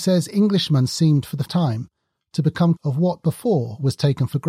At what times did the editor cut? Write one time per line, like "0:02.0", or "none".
0:01.5
0:02.8